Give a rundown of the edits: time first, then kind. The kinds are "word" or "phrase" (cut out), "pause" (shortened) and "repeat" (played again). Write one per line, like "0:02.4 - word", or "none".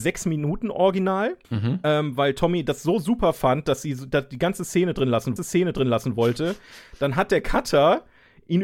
0:01.4 - pause
0:05.4 - repeat